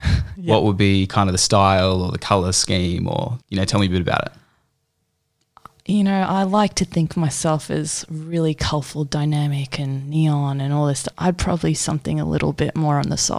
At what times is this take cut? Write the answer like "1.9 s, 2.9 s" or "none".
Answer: 3.4 s, 11.1 s